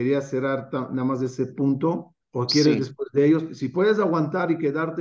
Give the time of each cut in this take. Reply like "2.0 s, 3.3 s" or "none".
2.2 s